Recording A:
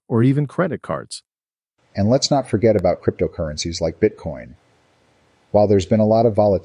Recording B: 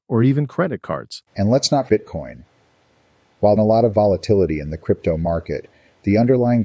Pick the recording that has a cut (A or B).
B